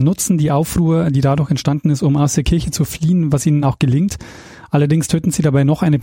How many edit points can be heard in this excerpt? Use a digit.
0